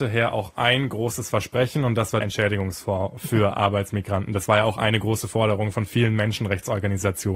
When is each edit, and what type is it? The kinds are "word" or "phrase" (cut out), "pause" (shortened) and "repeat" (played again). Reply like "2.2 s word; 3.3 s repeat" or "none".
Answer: 2.2 s word